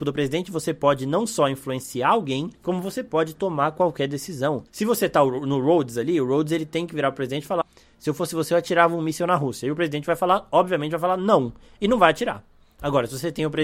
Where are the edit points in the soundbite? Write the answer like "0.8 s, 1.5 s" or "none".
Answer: 2.5 s, 4.7 s, 7.6 s